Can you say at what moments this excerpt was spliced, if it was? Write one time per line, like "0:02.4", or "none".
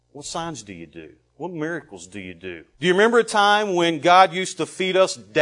0:02.7